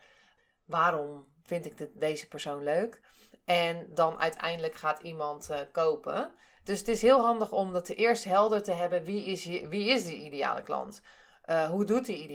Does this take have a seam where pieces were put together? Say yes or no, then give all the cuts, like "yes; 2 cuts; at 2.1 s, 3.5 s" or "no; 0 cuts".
no; 0 cuts